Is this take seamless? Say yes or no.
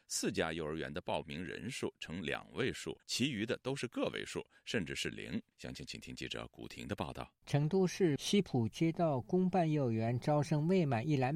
no